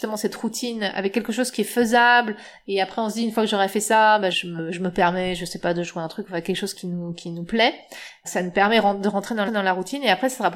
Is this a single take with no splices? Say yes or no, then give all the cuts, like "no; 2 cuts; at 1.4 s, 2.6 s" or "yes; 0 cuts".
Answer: no; 4 cuts; at 4.3 s, 6.7 s, 8.2 s, 9.5 s